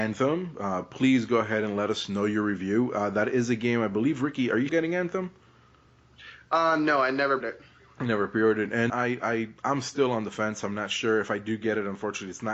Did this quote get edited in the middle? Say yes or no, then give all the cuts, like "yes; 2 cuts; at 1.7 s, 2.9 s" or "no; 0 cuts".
yes; 4 cuts; at 4.7 s, 7.4 s, 8.9 s, 9.6 s